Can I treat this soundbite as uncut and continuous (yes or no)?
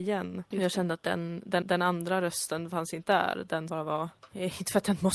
no